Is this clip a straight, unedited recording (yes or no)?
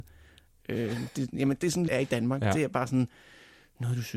no